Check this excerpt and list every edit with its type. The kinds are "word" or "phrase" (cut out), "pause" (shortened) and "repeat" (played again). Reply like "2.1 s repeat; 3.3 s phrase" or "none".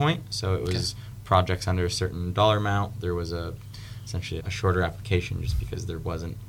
4.4 s word

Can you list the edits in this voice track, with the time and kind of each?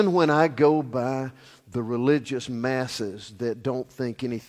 none

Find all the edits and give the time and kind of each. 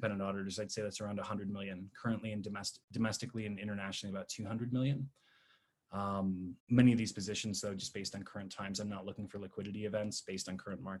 2.8 s pause; 6.6 s pause

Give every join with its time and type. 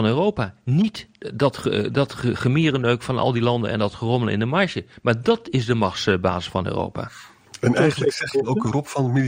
none

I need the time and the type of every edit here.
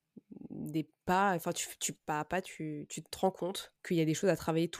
2.0 s pause; 3.8 s pause

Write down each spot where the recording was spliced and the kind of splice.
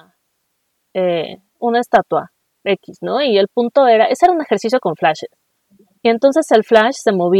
2.5 s pause; 5.6 s pause

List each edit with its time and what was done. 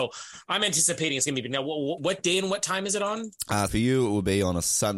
2.0 s word; 3.7 s word

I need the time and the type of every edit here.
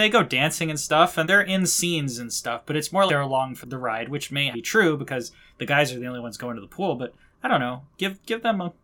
1.2 s word; 3.1 s word; 3.6 s word; 4.5 s word

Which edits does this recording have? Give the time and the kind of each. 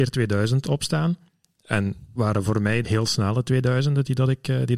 2.2 s word; 2.8 s word

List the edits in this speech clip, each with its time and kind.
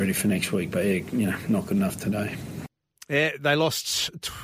none

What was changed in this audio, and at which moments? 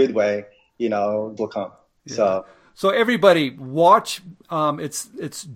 1.4 s phrase

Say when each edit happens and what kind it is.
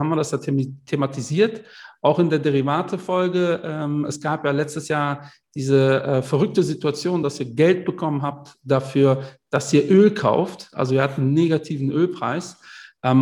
none

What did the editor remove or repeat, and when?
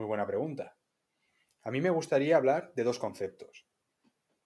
none

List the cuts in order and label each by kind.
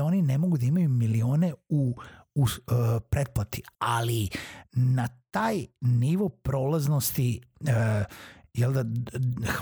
3.7 s pause

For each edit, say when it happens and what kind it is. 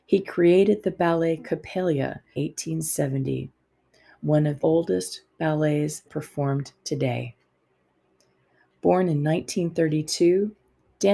2.3 s word; 4.6 s word; 6.1 s word

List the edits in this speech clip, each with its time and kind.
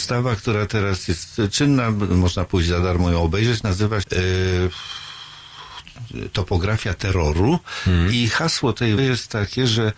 4.0 s word; 9.0 s word

